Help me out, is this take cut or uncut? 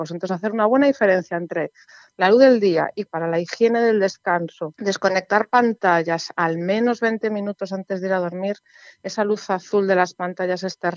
cut